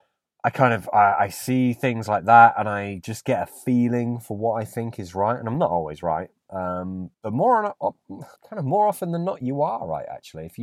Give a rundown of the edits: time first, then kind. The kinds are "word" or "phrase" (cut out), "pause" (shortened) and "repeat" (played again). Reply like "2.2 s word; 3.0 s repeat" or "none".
7.1 s pause; 8.4 s pause